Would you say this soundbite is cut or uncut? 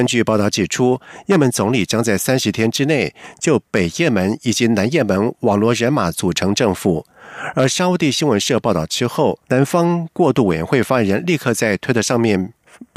cut